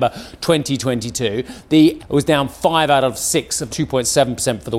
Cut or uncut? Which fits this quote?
cut